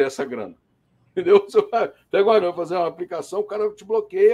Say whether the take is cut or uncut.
cut